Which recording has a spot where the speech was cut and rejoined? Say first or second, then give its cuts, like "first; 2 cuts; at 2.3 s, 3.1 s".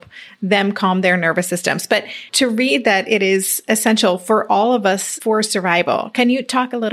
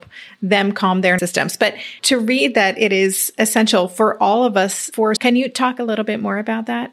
second; 2 cuts; at 1.2 s, 5.2 s